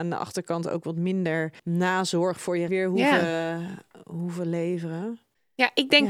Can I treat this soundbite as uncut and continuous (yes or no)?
no